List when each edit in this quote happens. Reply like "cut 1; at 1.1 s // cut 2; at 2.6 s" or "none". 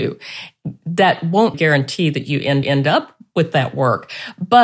cut 1; at 1.5 s // cut 2; at 2.6 s